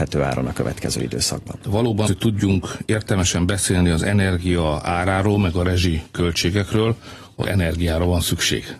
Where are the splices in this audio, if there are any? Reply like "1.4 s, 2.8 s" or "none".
2.1 s, 7.4 s